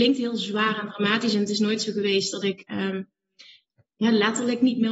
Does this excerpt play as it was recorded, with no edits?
yes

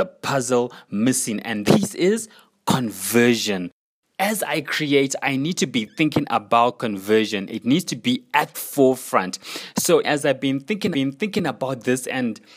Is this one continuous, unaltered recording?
no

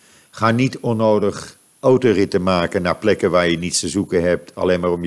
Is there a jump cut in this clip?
no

